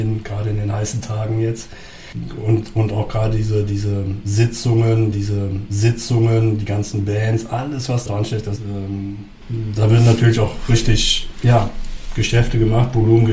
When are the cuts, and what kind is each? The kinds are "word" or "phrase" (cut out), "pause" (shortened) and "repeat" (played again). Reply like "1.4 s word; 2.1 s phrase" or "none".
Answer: 5.1 s repeat; 8.1 s word; 8.6 s word

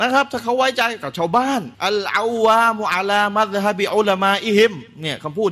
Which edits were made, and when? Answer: 1.7 s pause

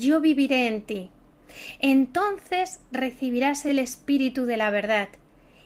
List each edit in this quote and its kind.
none

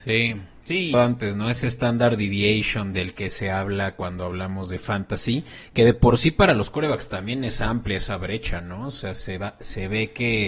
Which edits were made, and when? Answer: 0.9 s phrase

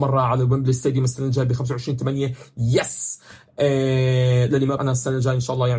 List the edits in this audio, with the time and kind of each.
4.8 s word

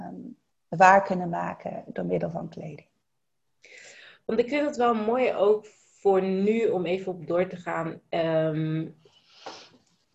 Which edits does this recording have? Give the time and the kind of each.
none

